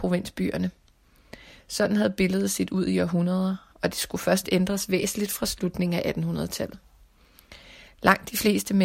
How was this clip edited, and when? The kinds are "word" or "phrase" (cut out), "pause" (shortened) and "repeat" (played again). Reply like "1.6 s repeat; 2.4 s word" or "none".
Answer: none